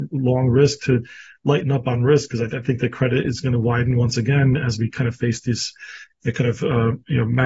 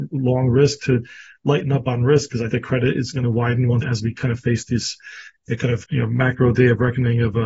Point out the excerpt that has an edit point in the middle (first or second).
second